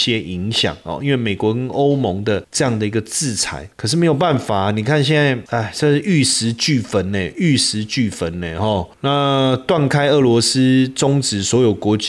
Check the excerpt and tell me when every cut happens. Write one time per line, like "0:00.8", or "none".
none